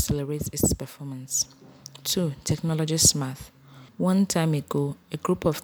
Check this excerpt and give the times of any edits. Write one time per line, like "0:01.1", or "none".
0:03.9